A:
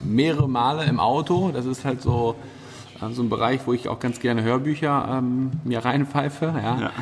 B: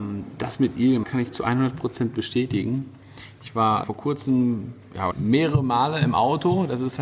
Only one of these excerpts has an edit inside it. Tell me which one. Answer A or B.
B